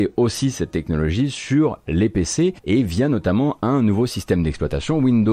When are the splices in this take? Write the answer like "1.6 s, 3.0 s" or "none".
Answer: 2.6 s